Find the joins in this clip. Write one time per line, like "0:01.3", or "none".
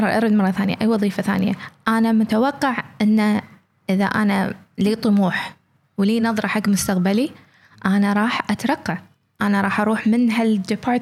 none